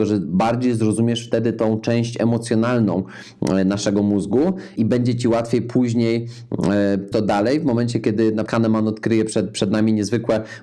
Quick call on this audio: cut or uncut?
cut